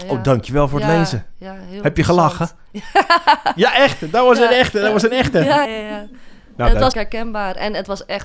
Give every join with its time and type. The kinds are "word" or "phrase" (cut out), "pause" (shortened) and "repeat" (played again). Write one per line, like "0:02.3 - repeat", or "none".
0:05.6 - word
0:06.9 - word